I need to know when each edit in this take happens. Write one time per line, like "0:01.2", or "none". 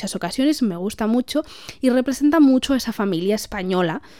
none